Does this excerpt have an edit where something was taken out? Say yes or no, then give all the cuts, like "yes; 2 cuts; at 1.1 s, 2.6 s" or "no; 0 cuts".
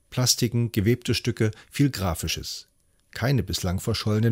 no; 0 cuts